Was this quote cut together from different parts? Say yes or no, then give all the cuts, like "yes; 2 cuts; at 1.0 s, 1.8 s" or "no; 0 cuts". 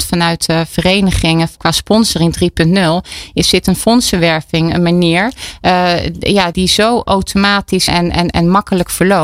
yes; 3 cuts; at 1.6 s, 6.5 s, 7.9 s